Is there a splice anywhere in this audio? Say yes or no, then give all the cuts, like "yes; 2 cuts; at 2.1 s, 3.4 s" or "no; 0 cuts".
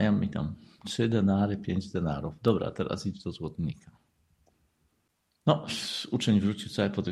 no; 0 cuts